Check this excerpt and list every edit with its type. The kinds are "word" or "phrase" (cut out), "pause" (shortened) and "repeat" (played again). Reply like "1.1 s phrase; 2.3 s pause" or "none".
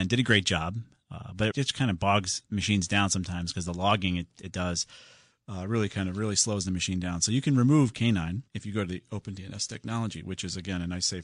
1.5 s phrase; 8.5 s pause